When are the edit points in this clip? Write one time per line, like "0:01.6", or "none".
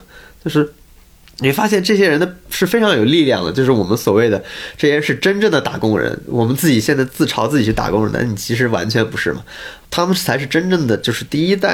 0:09.8